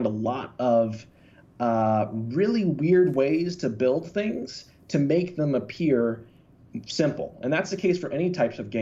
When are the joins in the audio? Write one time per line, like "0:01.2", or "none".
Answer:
none